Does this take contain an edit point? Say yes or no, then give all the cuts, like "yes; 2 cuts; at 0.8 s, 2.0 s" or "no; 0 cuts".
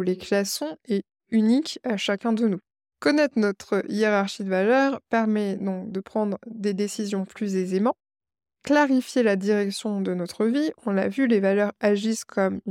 no; 0 cuts